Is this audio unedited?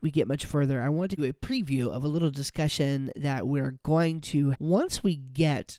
no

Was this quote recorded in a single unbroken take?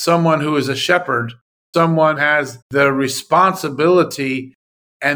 no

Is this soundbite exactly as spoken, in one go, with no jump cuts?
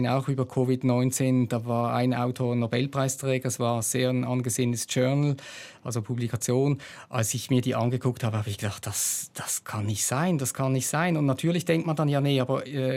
yes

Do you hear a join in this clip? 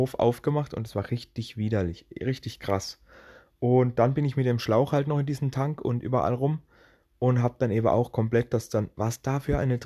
no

